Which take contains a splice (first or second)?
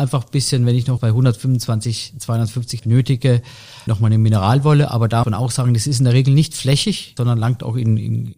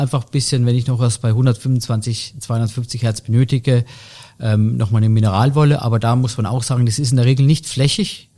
first